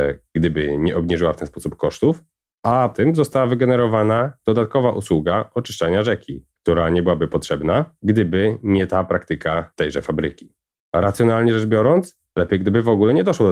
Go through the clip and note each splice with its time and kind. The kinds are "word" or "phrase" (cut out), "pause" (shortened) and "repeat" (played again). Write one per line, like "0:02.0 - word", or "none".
0:02.9 - word
0:10.8 - pause